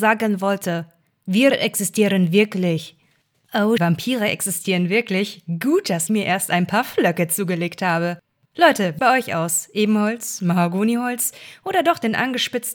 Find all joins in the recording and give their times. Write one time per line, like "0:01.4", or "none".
0:03.8
0:06.1
0:09.0